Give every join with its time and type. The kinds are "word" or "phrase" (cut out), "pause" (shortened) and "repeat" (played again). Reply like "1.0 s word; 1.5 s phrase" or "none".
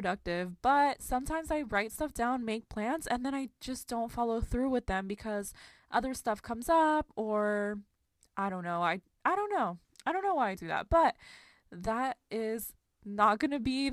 none